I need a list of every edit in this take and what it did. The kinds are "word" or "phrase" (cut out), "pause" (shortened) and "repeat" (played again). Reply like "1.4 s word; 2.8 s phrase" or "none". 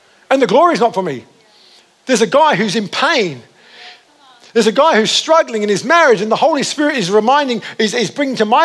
none